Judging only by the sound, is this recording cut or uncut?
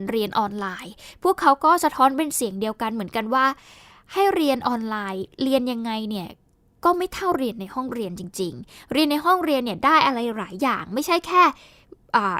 uncut